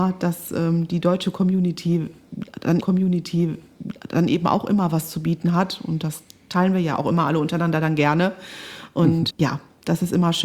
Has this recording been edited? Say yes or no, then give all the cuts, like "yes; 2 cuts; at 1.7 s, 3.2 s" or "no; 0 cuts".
yes; 2 cuts; at 2.8 s, 9.3 s